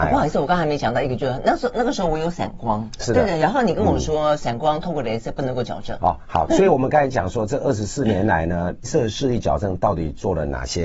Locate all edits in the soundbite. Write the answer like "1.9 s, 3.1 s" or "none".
3.0 s, 6.5 s, 8.8 s